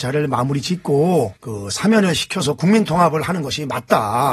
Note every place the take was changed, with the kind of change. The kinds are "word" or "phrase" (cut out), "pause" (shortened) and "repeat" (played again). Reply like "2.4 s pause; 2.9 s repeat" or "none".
1.4 s pause